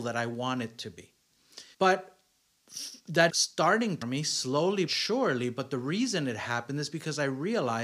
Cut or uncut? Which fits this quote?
cut